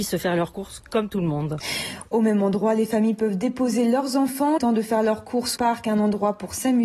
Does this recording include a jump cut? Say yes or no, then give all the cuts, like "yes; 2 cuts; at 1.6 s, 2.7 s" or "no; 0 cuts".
yes; 2 cuts; at 4.6 s, 5.6 s